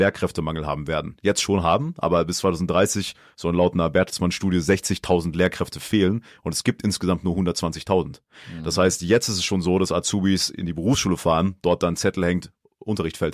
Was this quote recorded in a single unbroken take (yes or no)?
yes